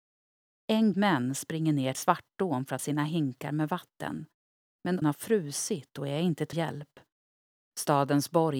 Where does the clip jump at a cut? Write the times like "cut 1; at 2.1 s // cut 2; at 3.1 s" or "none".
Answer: cut 1; at 0.9 s // cut 2; at 1.9 s // cut 3; at 2.8 s // cut 4; at 5.0 s // cut 5; at 6.5 s

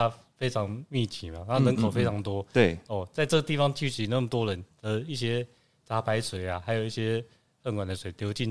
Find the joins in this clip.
none

